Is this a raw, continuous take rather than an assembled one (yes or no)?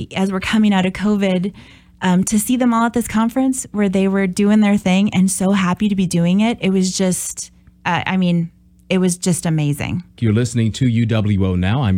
yes